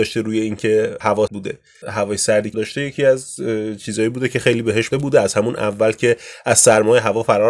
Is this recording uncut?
no; 4 cuts; at 1.3 s, 1.8 s, 2.5 s, 4.9 s

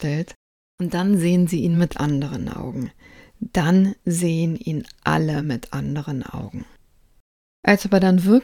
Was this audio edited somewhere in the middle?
no; 0 cuts

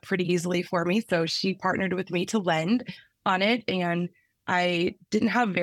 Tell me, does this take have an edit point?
no; 0 cuts

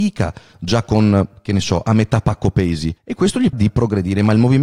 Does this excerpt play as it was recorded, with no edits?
no; 2 cuts; at 3.0 s, 3.5 s

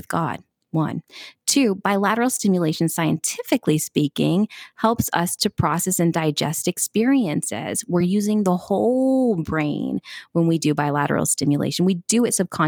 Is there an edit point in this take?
no; 0 cuts

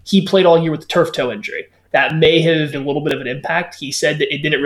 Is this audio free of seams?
no; 1 cut; at 2.7 s

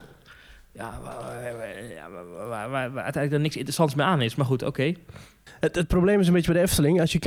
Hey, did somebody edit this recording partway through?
yes; 1 cut; at 5.5 s

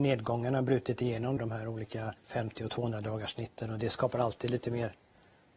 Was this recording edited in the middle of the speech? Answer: yes; 2 cuts; at 1.4 s, 2.2 s

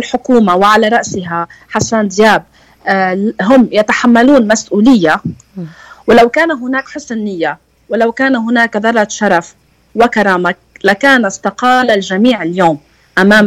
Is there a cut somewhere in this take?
no; 0 cuts

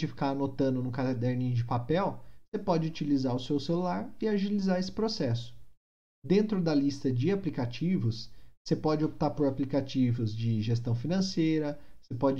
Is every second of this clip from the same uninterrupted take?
yes; 0 cuts

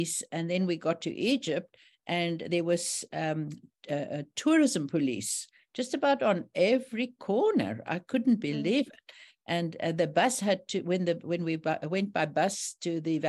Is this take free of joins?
yes; 0 cuts

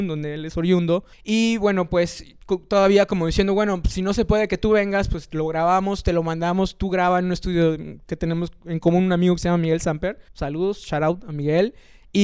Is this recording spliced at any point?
yes; 2 cuts; at 1.1 s, 10.3 s

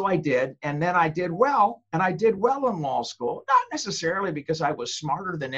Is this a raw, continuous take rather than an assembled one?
yes; 0 cuts

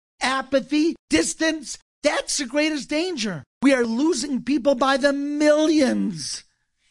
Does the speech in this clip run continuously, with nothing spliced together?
no; 2 cuts; at 1.0 s, 3.5 s

